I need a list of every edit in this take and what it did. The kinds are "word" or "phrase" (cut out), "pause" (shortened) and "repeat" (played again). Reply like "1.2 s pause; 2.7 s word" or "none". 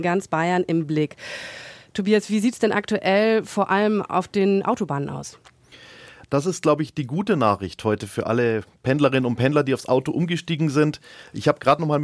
none